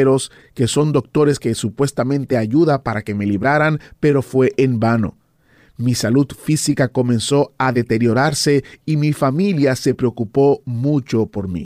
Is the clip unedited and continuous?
yes; 0 cuts

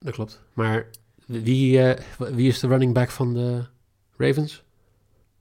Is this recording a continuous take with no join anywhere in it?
yes; 0 cuts

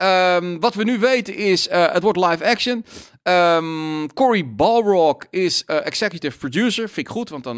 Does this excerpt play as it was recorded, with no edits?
yes; 0 cuts

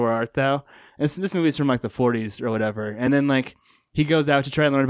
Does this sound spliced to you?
no; 0 cuts

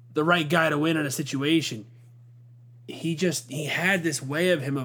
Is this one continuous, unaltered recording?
yes; 0 cuts

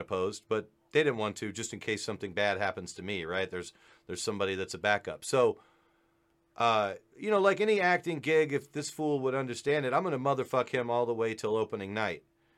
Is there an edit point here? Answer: no; 0 cuts

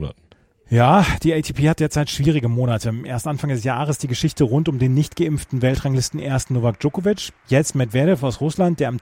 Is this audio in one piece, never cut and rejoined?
yes; 0 cuts

